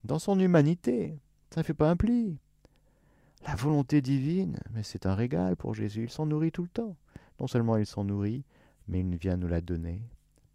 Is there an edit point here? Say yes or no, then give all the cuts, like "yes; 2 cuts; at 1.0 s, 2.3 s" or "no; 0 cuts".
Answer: no; 0 cuts